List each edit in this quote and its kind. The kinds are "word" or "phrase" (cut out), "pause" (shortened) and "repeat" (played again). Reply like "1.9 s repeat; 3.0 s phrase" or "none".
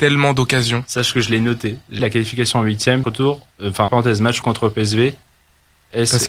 2.0 s word; 3.0 s word; 3.5 s pause; 3.9 s word; 4.4 s word